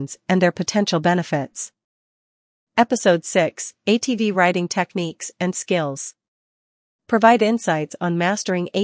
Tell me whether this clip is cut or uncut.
uncut